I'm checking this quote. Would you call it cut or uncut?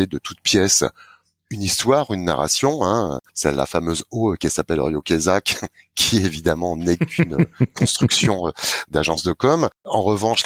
uncut